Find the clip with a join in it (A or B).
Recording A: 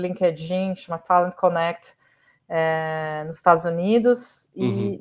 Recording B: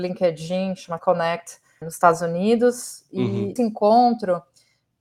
B